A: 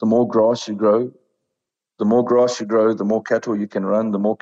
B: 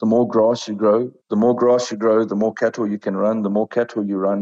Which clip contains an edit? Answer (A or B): B